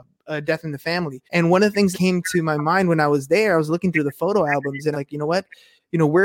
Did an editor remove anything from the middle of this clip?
yes; 3 cuts; at 1.2 s, 1.9 s, 4.9 s

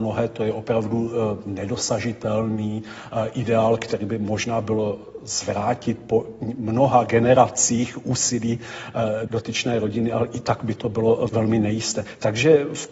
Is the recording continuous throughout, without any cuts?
no; 2 cuts; at 9.3 s, 11.3 s

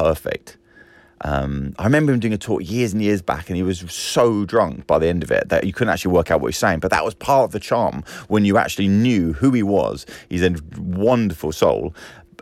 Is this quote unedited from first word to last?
yes; 0 cuts

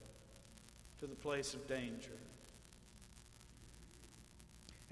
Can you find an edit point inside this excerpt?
no; 0 cuts

